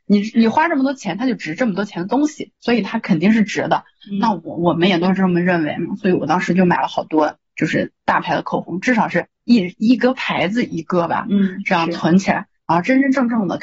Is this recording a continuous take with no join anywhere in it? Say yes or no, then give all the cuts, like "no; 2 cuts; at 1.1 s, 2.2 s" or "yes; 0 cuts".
no; 2 cuts; at 2.5 s, 9.4 s